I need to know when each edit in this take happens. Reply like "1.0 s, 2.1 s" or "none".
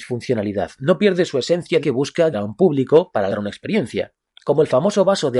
1.8 s, 2.3 s, 3.3 s